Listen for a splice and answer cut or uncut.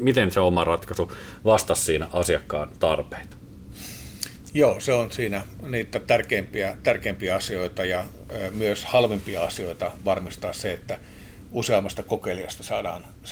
uncut